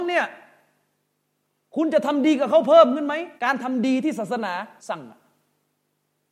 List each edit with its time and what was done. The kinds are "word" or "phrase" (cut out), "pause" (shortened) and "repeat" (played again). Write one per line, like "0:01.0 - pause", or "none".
0:03.4 - pause
0:04.8 - pause